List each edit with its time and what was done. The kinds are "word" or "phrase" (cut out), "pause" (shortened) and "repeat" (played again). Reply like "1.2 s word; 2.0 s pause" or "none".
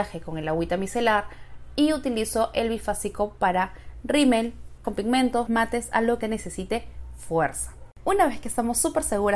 4.8 s word; 5.5 s word; 6.2 s word